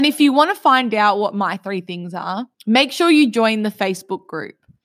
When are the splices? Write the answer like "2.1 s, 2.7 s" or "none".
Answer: 2.5 s